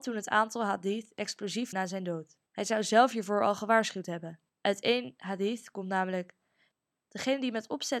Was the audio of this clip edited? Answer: yes; 3 cuts; at 1.7 s, 2.5 s, 4.5 s

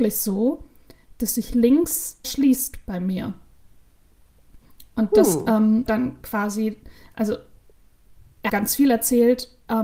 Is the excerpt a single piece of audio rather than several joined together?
no; 3 cuts; at 2.2 s, 5.9 s, 8.5 s

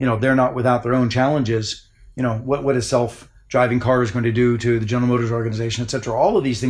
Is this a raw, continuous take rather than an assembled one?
yes; 0 cuts

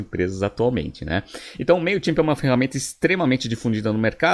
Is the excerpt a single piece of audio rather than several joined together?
yes; 0 cuts

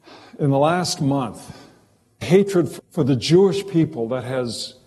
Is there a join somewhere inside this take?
yes; 2 cuts; at 2.2 s, 2.8 s

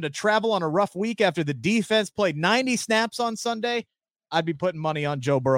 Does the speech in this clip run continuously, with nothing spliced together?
yes; 0 cuts

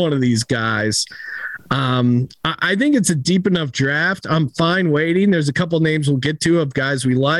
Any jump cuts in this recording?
no; 0 cuts

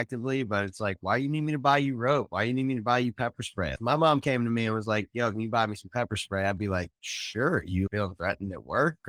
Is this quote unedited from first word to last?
yes; 0 cuts

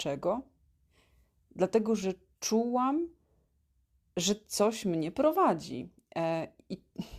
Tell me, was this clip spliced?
no; 0 cuts

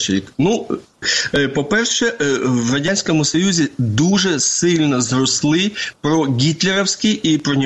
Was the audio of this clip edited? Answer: no; 0 cuts

